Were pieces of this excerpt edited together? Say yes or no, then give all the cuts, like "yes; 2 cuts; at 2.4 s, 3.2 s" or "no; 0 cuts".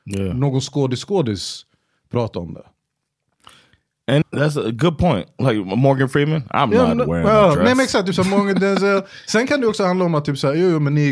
yes; 1 cut; at 4.2 s